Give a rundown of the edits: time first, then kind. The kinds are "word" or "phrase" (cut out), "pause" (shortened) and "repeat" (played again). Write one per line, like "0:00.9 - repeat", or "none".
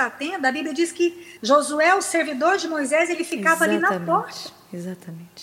0:01.4 - pause

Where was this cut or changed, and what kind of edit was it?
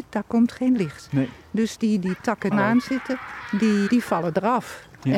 0:02.5 - phrase
0:03.9 - word

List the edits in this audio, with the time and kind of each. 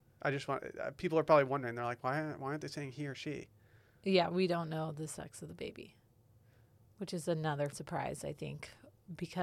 0:07.7 - word

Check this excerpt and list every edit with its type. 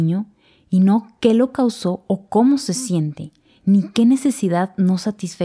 none

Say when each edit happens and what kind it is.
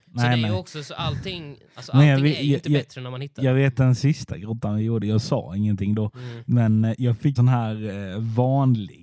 0:01.7 - pause
0:07.4 - word

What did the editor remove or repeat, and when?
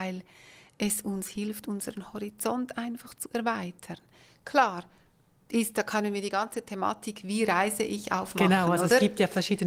none

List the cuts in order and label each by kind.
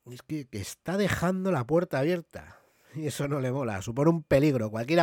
none

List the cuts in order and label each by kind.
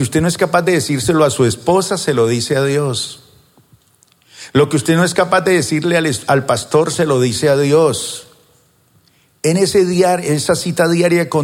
none

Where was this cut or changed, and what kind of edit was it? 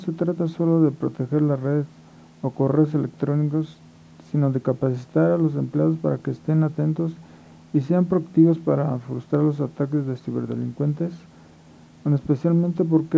none

